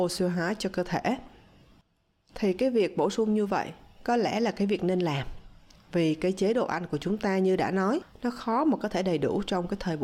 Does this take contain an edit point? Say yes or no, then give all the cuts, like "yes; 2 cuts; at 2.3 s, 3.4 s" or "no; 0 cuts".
no; 0 cuts